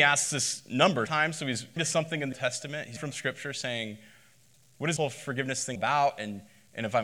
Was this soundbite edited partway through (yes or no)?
yes